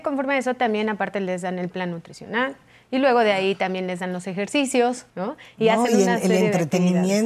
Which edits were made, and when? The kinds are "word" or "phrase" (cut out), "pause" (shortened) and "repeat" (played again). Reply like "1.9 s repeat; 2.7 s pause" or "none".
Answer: 5.1 s pause